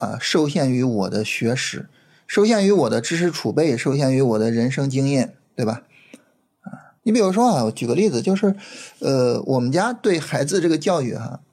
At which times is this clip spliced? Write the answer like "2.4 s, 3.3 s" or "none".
5.4 s, 7.0 s